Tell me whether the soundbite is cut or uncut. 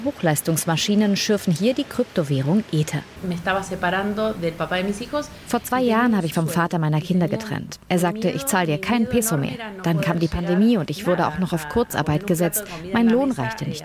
cut